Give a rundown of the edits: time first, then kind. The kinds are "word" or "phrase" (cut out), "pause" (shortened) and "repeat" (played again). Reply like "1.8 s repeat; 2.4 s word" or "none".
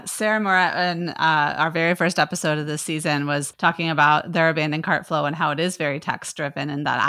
none